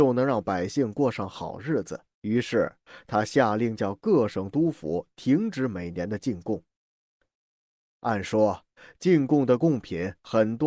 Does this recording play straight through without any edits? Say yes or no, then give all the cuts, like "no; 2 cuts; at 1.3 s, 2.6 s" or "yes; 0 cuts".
no; 1 cut; at 2.1 s